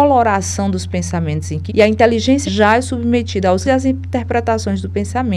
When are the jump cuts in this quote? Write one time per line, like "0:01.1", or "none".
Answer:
0:01.7
0:02.4
0:03.6